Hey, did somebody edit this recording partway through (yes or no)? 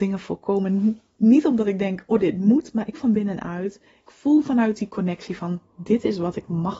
yes